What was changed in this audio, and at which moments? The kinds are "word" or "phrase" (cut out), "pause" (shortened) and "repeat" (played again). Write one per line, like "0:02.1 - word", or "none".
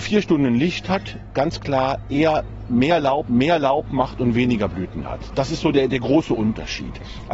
0:03.3 - repeat

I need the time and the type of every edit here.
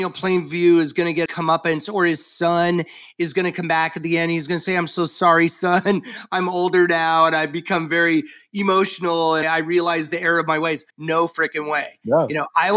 0:01.3 - word
0:09.4 - word
0:10.9 - pause

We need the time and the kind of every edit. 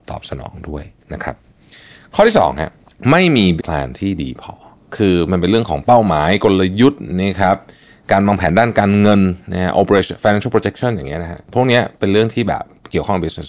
0:03.6 - word

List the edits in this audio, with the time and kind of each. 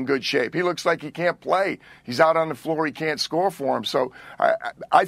none

